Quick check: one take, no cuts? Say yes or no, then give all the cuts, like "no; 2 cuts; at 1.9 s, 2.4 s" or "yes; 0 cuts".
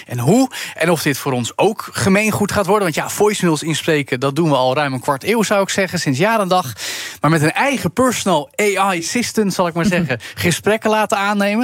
yes; 0 cuts